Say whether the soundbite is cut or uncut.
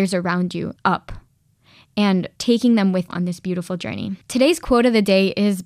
cut